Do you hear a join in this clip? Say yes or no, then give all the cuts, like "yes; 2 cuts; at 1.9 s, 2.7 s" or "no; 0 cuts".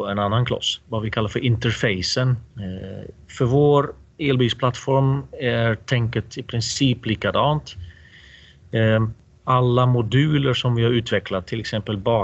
no; 0 cuts